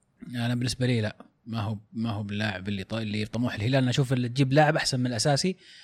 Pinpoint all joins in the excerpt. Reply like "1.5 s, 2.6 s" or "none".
none